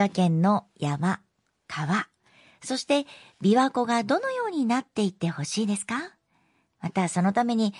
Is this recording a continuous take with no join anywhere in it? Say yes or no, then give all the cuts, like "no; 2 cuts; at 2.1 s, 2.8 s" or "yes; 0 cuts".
no; 1 cut; at 1.5 s